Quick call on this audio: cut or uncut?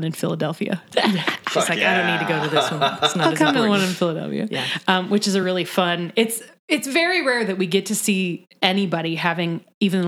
uncut